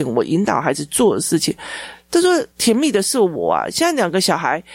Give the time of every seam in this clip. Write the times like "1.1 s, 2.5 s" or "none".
2.5 s